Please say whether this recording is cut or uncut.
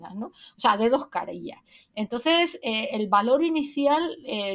uncut